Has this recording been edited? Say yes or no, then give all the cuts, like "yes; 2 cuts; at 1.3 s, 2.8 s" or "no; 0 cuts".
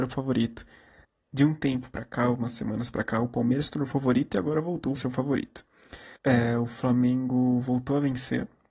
yes; 3 cuts; at 1.0 s, 5.0 s, 6.2 s